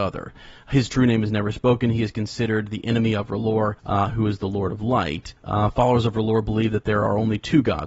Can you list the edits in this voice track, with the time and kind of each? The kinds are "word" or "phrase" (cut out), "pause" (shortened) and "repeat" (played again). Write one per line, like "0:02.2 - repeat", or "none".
0:03.8 - pause
0:05.4 - pause